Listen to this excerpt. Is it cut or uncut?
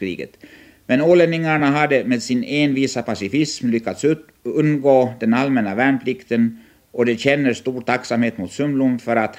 uncut